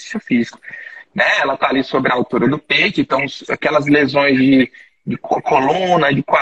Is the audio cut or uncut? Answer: uncut